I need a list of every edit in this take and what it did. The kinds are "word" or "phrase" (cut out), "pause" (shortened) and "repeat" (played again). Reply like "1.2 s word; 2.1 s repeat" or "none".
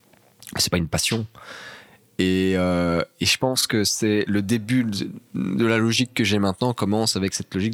none